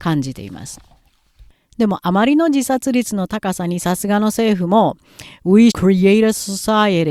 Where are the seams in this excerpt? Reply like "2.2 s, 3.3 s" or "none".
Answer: 5.7 s